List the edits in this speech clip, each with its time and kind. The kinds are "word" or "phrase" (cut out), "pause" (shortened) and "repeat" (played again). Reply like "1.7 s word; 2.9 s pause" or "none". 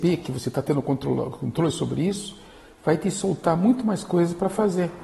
none